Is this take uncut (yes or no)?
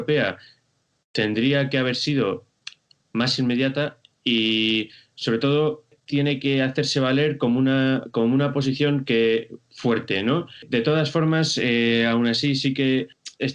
yes